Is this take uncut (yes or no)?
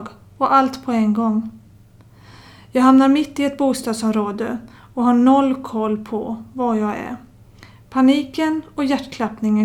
yes